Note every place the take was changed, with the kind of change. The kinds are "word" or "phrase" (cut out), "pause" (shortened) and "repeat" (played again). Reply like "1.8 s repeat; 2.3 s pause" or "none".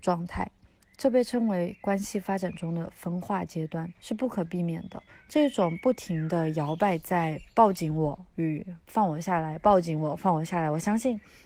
4.0 s pause; 5.1 s pause